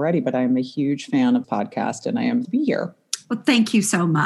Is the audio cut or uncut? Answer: cut